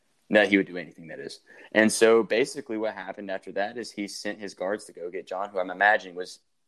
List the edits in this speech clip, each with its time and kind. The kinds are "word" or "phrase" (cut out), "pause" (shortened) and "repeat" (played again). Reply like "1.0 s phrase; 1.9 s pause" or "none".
none